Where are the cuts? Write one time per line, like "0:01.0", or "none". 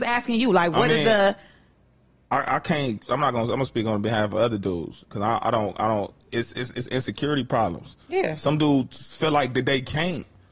none